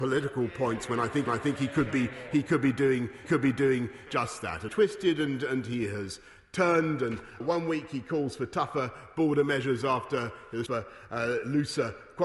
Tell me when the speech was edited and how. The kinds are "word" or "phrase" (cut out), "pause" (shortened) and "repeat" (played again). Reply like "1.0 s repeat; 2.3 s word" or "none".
1.3 s repeat; 3.2 s repeat; 4.7 s phrase; 7.4 s word; 10.7 s phrase